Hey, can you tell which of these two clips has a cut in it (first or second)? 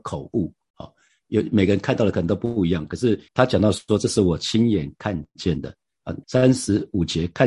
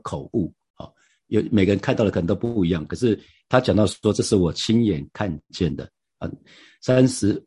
first